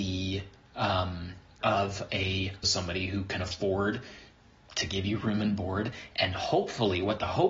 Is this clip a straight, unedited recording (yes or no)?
no